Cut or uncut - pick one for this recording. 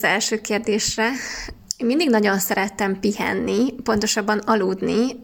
uncut